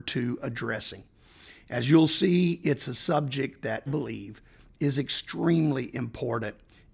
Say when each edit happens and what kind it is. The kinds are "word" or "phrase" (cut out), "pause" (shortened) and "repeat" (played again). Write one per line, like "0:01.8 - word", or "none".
0:03.9 - word